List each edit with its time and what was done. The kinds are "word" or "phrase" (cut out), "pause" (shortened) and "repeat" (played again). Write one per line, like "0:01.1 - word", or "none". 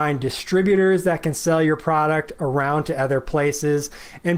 none